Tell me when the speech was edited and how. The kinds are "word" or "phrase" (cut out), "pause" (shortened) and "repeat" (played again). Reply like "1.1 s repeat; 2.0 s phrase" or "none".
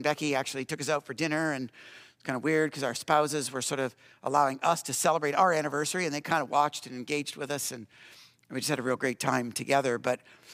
none